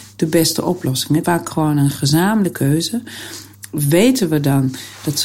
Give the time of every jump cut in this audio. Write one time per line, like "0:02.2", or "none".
0:01.2
0:02.5